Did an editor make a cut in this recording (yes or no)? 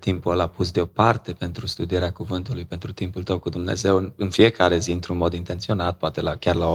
no